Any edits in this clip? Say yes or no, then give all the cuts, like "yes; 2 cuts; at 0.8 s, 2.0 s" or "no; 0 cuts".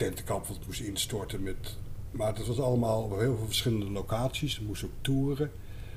no; 0 cuts